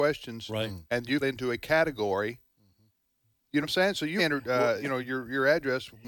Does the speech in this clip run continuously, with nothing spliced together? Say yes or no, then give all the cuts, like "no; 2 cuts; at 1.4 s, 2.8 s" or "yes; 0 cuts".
no; 4 cuts; at 1.2 s, 3.6 s, 4.2 s, 4.8 s